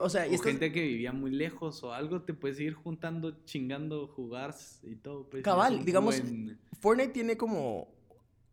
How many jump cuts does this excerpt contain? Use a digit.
1